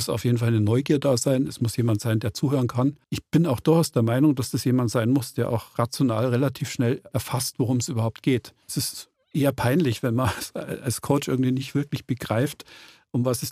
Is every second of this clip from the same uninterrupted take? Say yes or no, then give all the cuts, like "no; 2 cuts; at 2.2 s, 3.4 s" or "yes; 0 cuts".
no; 2 cuts; at 3.0 s, 8.6 s